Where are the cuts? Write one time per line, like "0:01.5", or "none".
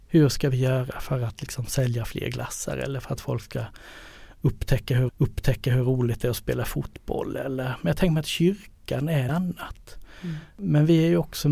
0:05.1
0:09.3

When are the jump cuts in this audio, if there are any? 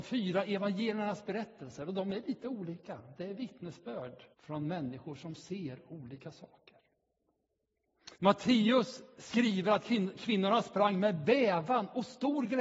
0:04.3
0:08.2

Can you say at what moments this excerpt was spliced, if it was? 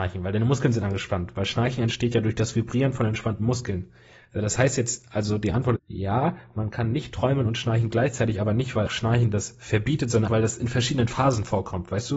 0:05.8
0:08.9
0:10.3

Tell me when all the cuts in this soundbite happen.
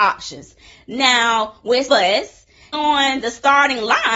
0:01.9
0:02.7

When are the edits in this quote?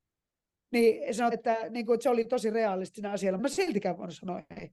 0:01.3
0:03.4

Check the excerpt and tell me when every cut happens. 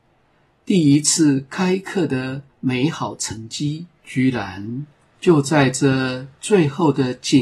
none

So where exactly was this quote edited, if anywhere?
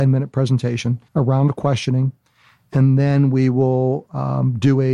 0:01.1

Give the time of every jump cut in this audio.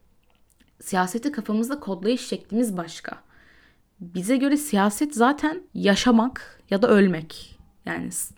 0:05.7

